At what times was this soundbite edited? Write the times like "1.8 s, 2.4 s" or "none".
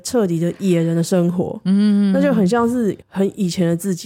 3.0 s